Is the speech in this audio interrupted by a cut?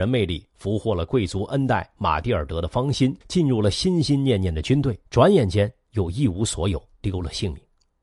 yes; 2 cuts; at 3.2 s, 5.1 s

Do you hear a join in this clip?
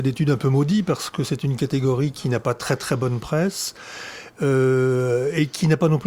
no; 0 cuts

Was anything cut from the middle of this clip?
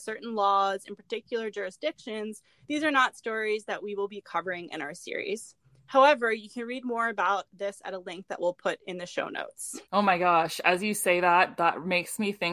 yes; 1 cut; at 9.8 s

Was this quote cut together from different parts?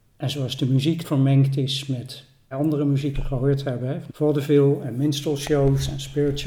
yes; 4 cuts; at 1.0 s, 2.5 s, 3.1 s, 4.1 s

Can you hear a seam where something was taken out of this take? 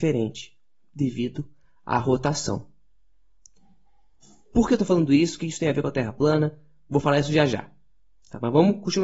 no; 0 cuts

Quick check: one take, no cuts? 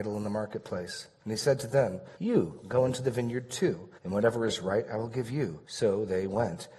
no; 3 cuts; at 2.1 s, 4.0 s, 5.6 s

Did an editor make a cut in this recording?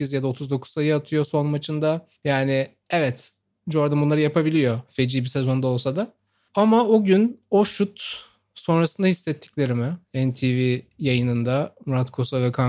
yes; 1 cut; at 10.0 s

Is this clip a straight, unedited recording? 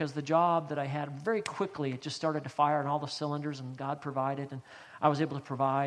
yes; 0 cuts

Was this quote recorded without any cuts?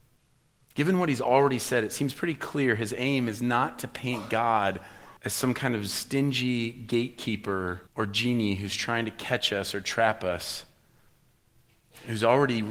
no; 2 cuts; at 5.2 s, 7.9 s

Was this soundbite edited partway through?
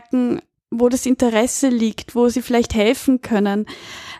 no; 0 cuts

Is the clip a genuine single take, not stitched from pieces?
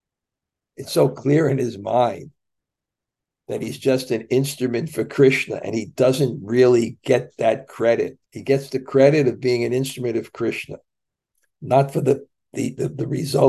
no; 1 cut; at 8.3 s

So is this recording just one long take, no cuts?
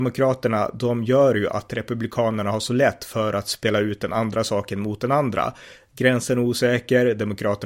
yes; 0 cuts

